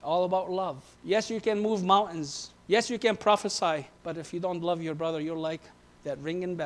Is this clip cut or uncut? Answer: cut